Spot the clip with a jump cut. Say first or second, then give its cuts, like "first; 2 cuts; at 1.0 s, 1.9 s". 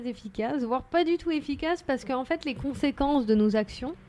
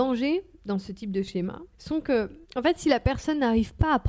second; 2 cuts; at 1.7 s, 2.4 s